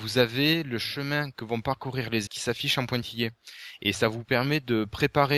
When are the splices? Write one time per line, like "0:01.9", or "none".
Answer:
0:02.3

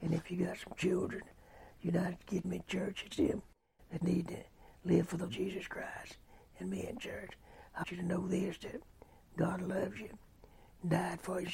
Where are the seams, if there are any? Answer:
0:02.4
0:03.1
0:04.0
0:05.3
0:07.8

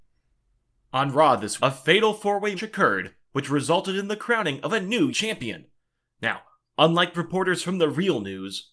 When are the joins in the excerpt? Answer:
0:01.6
0:02.6
0:05.1
0:07.1

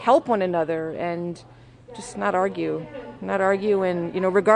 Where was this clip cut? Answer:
none

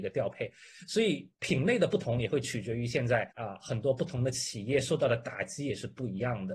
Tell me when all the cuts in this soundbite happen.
0:03.3

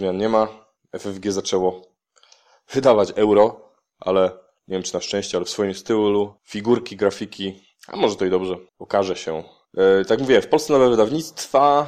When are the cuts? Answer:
0:06.4
0:08.7

